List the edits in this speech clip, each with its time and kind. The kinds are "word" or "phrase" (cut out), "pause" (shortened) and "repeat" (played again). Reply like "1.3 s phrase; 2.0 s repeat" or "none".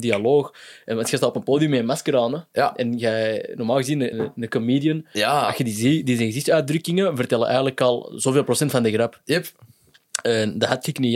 4.1 s word